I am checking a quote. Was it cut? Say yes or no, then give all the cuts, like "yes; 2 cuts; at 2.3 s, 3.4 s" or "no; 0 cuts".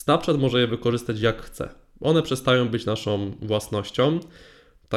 no; 0 cuts